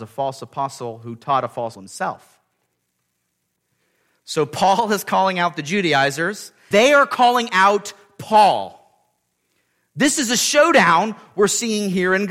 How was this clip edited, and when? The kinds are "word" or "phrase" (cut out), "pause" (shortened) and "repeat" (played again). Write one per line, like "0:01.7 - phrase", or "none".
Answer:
0:01.8 - word
0:06.7 - word